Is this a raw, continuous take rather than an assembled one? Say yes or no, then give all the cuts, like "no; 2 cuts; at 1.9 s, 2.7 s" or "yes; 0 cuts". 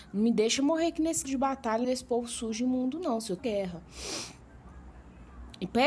no; 3 cuts; at 1.2 s, 1.8 s, 3.4 s